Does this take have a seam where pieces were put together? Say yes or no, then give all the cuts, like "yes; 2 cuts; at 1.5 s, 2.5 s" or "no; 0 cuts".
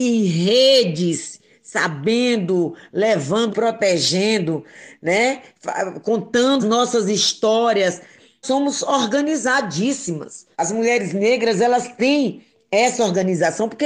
yes; 4 cuts; at 3.5 s, 6.6 s, 8.4 s, 10.5 s